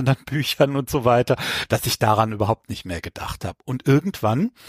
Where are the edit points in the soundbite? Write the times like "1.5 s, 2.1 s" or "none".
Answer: none